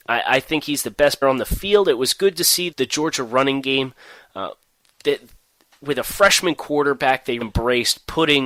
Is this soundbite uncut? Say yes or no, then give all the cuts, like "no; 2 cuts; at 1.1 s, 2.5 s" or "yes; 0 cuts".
no; 3 cuts; at 1.2 s, 2.7 s, 7.4 s